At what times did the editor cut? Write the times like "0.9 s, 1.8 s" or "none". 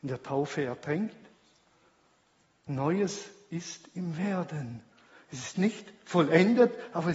none